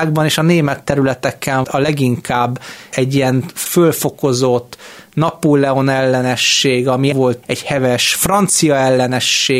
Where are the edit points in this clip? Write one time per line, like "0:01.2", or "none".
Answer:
0:01.6
0:03.7
0:07.1
0:07.4